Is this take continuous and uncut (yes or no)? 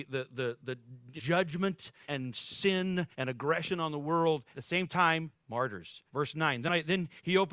no